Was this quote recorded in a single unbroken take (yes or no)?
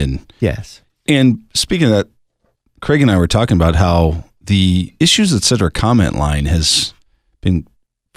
yes